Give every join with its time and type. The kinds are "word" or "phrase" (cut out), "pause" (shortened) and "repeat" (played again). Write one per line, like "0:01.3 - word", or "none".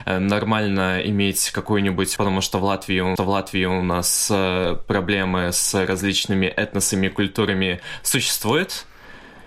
0:02.2 - word
0:03.2 - repeat